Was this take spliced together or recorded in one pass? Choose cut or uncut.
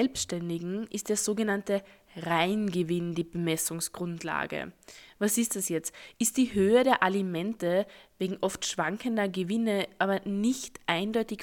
uncut